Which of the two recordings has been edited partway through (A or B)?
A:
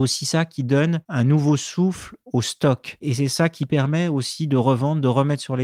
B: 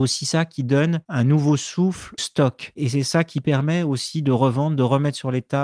B